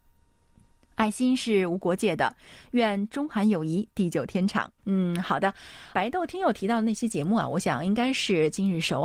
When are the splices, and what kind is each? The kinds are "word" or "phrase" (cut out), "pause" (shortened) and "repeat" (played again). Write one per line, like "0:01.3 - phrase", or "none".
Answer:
0:04.8 - pause
0:05.9 - word